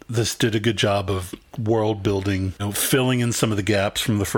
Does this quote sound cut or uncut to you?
cut